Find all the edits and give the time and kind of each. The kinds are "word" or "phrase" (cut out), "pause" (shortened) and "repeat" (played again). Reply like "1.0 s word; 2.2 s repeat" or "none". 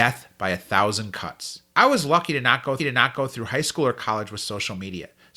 1.7 s pause; 2.8 s repeat